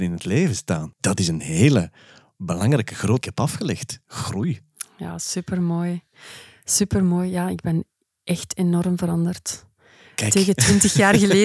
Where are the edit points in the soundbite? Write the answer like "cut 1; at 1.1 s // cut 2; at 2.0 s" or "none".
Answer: cut 1; at 0.9 s // cut 2; at 3.2 s